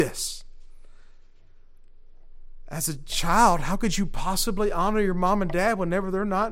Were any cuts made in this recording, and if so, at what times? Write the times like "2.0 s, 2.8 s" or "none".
none

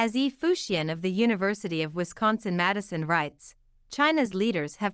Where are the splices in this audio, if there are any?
none

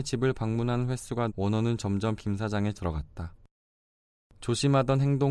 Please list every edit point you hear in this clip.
1.3 s, 2.2 s, 2.7 s

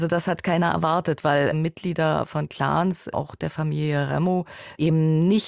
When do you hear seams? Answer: 1.5 s, 3.1 s

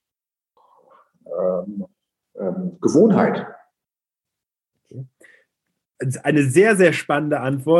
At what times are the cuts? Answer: none

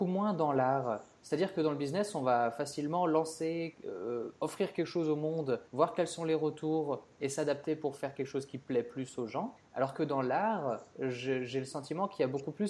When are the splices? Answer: 5.7 s, 9.6 s

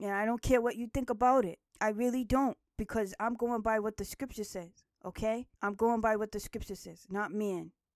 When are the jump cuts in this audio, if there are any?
1.7 s, 5.5 s

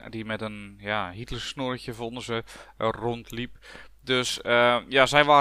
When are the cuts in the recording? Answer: none

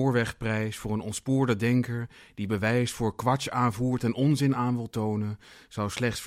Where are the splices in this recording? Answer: none

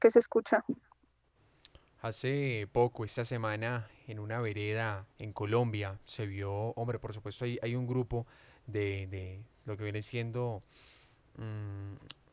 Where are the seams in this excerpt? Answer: 5.1 s

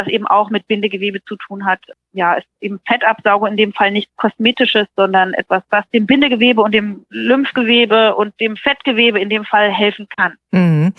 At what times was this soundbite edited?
none

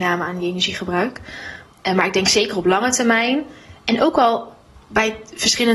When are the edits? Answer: none

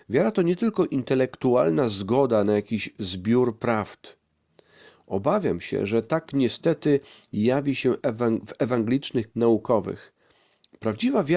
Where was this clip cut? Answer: 9.3 s

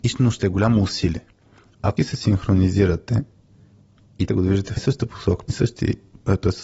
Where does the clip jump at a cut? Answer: 2.0 s, 4.3 s, 4.8 s, 5.5 s

